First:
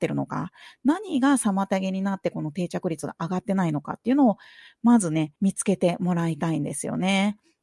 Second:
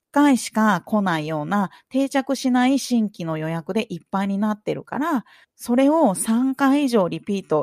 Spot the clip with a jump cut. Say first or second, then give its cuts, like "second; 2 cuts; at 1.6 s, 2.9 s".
second; 1 cut; at 5.4 s